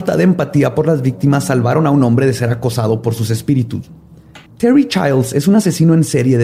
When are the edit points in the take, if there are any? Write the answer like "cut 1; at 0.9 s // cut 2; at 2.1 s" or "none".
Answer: cut 1; at 4.5 s